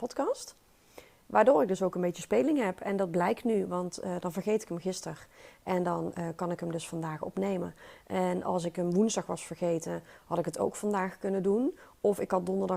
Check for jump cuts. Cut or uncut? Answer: uncut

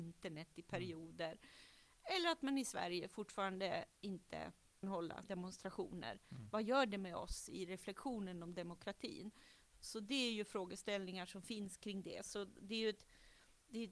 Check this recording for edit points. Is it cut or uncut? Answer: cut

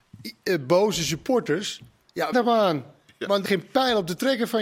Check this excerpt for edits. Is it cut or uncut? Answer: cut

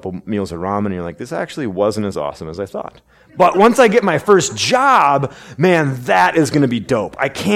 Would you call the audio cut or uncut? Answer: uncut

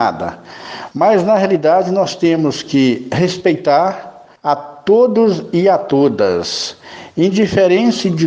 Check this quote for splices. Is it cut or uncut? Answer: cut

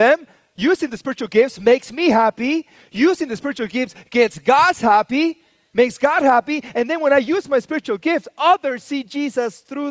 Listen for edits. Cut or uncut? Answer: uncut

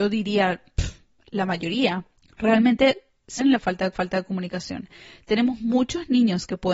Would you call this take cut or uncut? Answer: cut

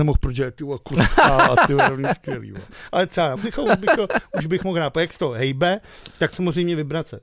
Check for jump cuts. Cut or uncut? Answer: cut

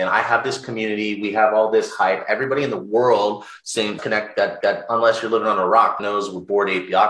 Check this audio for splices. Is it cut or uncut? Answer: cut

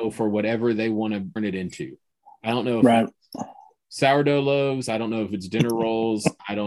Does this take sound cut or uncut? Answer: cut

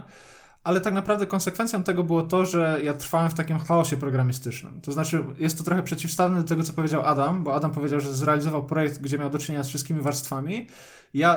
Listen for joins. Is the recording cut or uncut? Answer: uncut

